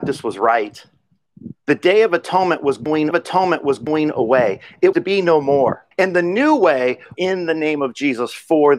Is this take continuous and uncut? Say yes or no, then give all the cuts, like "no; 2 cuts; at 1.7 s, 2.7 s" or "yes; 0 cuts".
no; 5 cuts; at 1.6 s, 3.1 s, 4.9 s, 5.9 s, 7.1 s